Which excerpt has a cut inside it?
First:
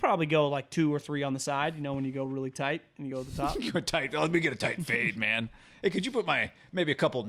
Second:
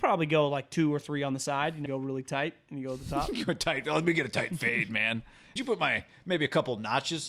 second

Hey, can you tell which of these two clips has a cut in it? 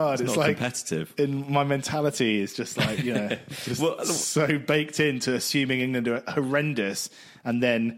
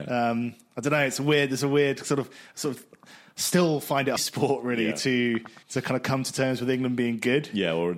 second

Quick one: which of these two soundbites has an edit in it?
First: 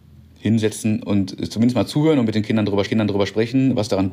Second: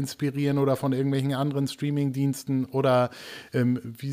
first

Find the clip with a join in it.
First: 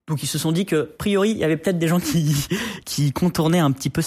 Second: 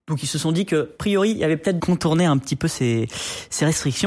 second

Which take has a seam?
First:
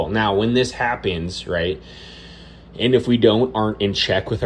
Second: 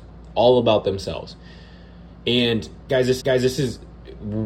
second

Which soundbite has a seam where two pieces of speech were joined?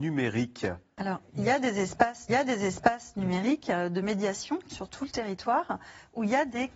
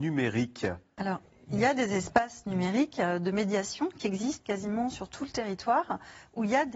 first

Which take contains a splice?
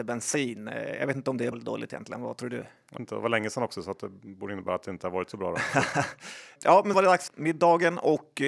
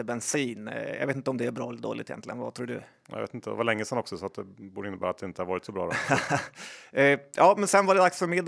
first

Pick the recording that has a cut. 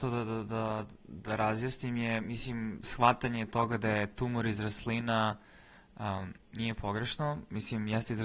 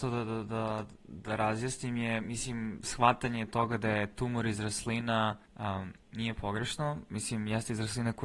second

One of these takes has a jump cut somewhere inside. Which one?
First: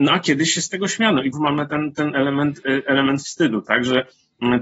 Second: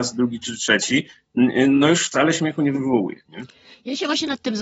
first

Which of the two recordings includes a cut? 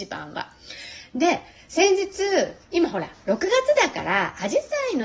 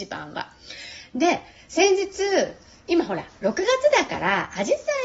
first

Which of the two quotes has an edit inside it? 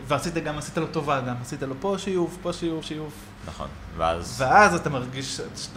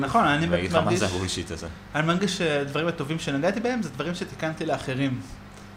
first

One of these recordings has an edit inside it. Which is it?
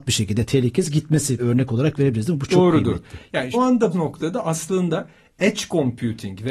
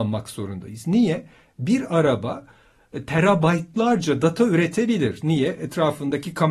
first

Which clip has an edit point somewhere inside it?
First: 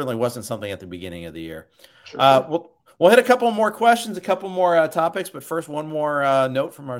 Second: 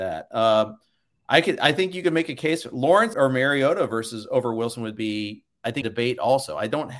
second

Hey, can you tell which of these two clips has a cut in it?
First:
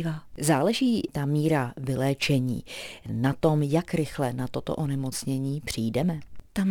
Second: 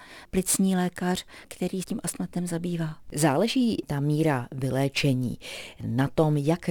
second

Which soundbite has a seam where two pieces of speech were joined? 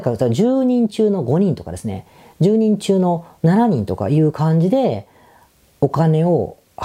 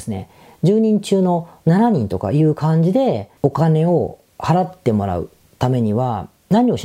second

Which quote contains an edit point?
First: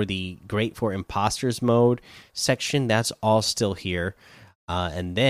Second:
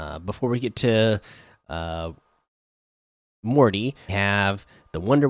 second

